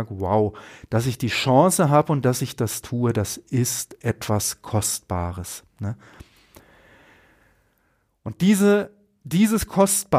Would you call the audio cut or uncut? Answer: uncut